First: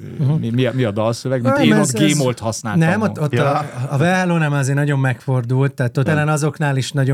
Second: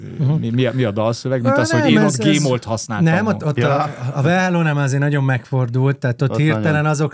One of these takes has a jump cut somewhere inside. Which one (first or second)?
first